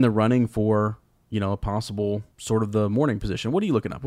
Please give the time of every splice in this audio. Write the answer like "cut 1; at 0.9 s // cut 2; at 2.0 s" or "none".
cut 1; at 2.3 s